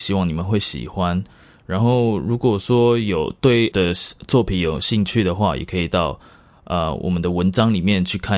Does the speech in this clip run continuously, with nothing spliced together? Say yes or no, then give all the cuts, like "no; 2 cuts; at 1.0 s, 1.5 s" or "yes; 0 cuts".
no; 1 cut; at 3.7 s